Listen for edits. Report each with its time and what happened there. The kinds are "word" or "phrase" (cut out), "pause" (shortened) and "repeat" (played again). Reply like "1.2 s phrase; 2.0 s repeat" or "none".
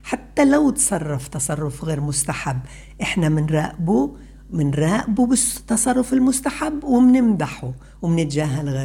none